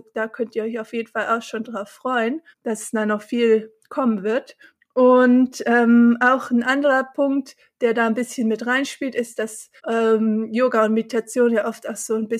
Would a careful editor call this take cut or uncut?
cut